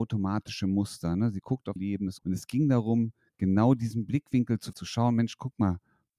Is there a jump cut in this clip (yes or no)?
yes